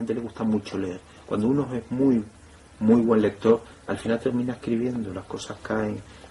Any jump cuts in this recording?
no; 0 cuts

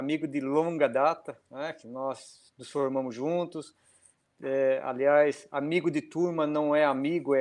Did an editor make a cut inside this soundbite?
no; 0 cuts

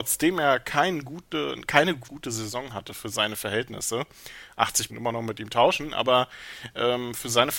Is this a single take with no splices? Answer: no; 2 cuts; at 2.1 s, 4.9 s

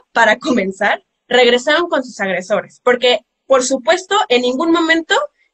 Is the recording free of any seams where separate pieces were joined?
yes; 0 cuts

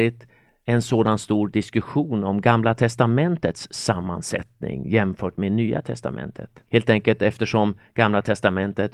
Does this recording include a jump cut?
yes; 1 cut; at 6.7 s

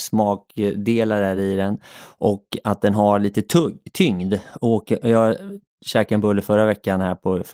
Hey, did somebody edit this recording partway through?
no; 0 cuts

